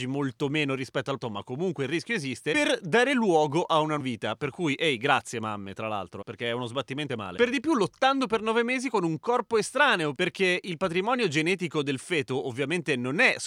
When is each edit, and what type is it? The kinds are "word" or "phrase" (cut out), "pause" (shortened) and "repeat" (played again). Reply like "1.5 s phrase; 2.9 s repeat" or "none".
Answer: 1.2 s word; 4.0 s word; 6.2 s word; 7.1 s word